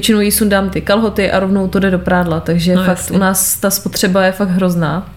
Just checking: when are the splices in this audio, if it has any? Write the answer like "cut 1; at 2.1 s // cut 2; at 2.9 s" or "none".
none